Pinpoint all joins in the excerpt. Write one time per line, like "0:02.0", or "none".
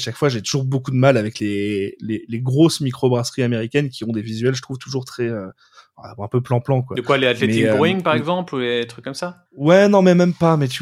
0:09.5